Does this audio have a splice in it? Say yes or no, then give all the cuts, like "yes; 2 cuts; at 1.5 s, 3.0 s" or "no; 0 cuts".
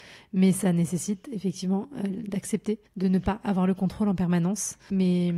yes; 1 cut; at 2.9 s